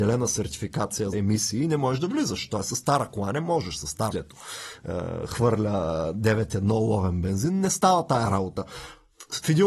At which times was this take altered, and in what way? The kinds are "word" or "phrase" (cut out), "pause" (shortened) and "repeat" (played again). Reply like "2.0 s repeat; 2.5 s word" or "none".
1.1 s word; 4.1 s word